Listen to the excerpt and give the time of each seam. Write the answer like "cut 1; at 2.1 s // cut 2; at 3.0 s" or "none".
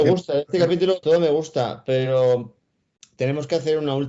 cut 1; at 1.0 s